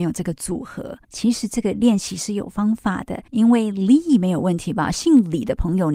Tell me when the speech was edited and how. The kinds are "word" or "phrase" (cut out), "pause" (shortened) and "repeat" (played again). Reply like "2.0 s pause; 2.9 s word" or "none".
1.0 s pause; 3.3 s pause